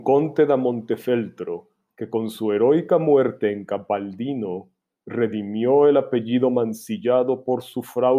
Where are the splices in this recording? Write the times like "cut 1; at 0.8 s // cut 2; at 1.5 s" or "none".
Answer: none

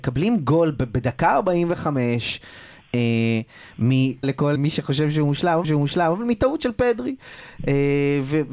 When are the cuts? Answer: cut 1; at 4.2 s // cut 2; at 4.6 s // cut 3; at 5.6 s

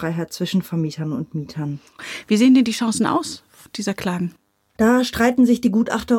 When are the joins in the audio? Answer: none

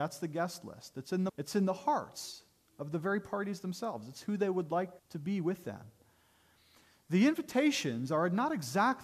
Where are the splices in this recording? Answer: cut 1; at 1.3 s // cut 2; at 5.0 s

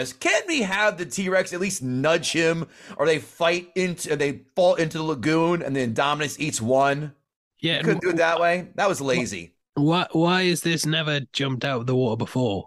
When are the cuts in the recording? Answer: none

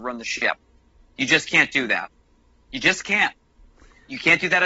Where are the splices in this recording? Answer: none

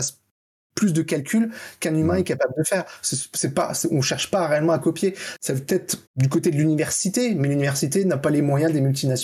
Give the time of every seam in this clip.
cut 1; at 6.1 s

